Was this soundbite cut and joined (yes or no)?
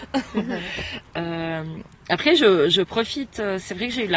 no